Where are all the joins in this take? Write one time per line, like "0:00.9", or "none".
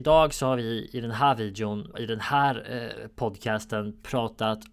0:01.9

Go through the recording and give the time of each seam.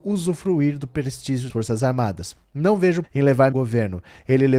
0:01.5
0:03.0
0:03.5

